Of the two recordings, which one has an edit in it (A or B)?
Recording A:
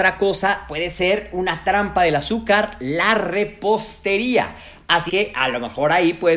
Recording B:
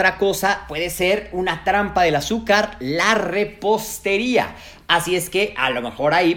A